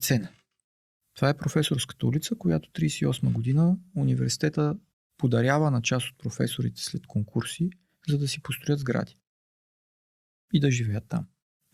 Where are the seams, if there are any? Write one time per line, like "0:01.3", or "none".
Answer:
none